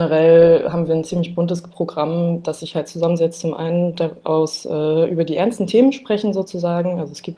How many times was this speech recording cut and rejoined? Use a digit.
0